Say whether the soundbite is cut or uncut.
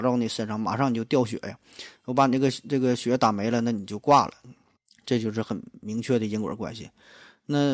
cut